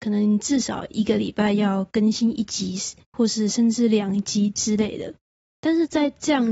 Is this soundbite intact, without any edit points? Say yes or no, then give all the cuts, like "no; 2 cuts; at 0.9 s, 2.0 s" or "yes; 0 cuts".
yes; 0 cuts